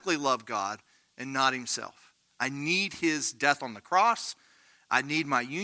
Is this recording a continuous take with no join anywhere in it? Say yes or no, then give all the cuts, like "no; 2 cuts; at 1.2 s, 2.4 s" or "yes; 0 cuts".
yes; 0 cuts